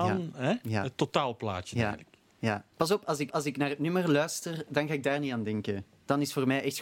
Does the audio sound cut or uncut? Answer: cut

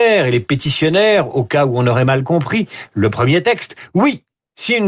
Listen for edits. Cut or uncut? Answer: uncut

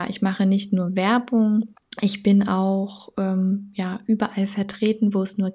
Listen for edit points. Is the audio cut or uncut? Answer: cut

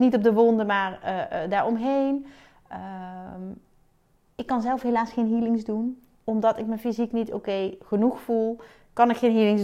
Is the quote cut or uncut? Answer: uncut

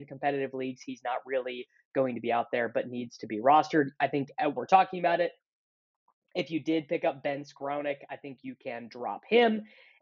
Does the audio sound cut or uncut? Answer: cut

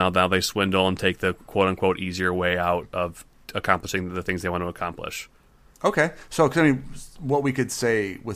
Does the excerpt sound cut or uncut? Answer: uncut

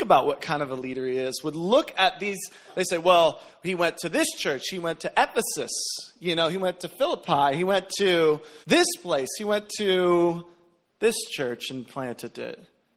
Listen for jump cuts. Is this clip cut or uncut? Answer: cut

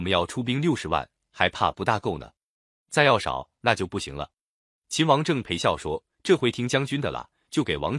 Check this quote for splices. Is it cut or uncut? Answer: uncut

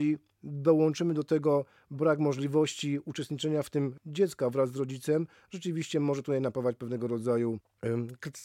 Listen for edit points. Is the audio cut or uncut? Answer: uncut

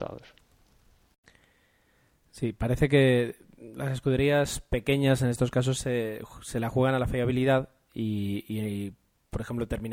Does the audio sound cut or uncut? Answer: uncut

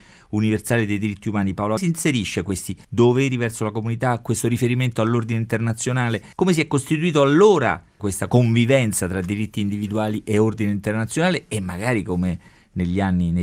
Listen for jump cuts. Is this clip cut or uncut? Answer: cut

